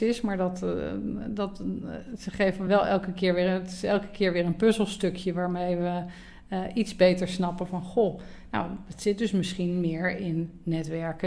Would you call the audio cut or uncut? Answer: uncut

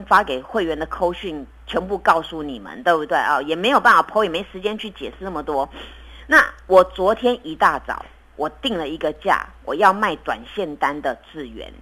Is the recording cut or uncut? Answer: uncut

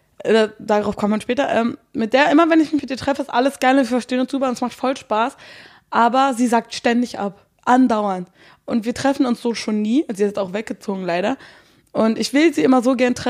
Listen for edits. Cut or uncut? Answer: uncut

